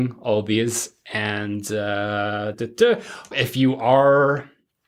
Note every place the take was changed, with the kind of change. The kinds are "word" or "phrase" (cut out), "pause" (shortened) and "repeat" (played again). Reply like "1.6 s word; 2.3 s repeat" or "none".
2.5 s word; 3.3 s word

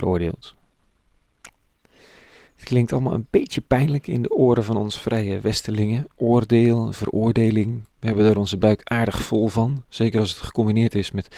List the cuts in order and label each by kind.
none

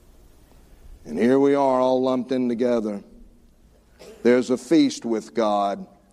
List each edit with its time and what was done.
1.0 s pause

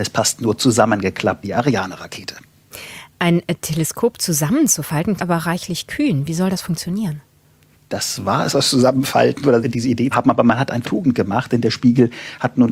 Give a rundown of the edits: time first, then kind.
1.4 s word; 5.2 s word; 7.7 s pause; 8.5 s word; 9.6 s word; 10.1 s word; 10.8 s phrase

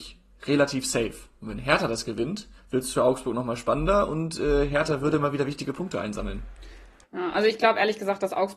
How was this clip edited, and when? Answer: 2.6 s pause

